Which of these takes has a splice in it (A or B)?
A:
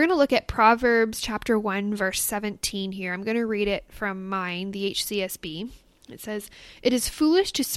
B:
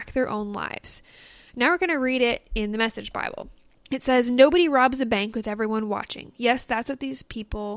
B